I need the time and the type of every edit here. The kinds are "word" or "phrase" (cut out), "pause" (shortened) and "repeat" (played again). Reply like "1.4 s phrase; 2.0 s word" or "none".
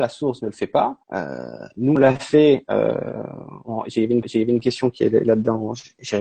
1.0 s pause; 2.0 s word; 4.2 s repeat